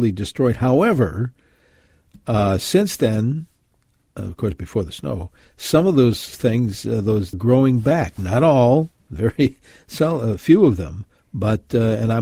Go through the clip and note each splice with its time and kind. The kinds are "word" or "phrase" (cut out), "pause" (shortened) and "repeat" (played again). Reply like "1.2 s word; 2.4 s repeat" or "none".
7.3 s phrase